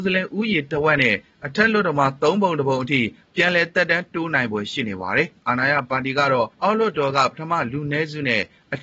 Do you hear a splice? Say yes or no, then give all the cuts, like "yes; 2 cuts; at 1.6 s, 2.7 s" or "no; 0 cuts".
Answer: yes; 1 cut; at 6.5 s